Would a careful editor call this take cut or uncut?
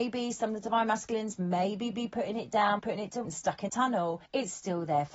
cut